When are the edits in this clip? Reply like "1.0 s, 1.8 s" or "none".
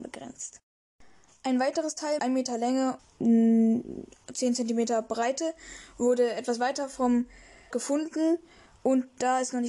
2.2 s, 3.0 s, 7.7 s